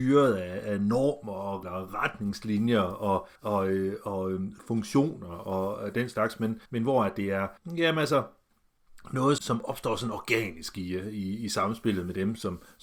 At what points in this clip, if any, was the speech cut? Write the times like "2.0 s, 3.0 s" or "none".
1.6 s, 3.4 s, 6.7 s, 7.6 s, 9.4 s